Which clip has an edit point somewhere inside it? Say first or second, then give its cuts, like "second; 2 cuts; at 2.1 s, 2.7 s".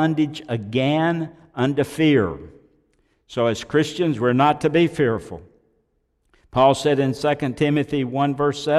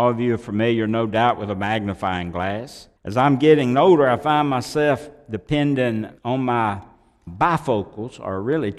second; 3 cuts; at 3.0 s, 6.2 s, 7.3 s